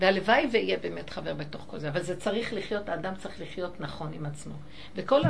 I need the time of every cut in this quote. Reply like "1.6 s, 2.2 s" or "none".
none